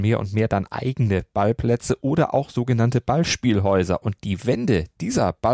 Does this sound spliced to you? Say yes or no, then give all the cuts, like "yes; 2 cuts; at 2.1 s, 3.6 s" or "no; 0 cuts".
no; 0 cuts